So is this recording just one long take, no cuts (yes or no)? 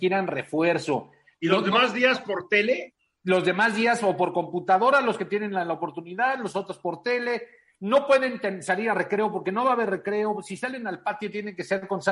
yes